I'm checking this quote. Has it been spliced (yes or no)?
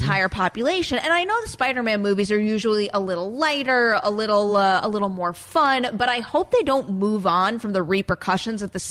no